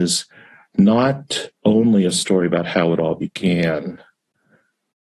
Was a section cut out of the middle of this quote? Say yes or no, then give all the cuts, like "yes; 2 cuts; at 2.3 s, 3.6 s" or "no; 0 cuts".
no; 0 cuts